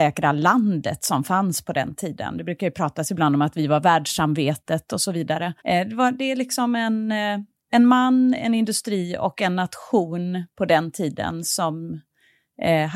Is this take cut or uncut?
cut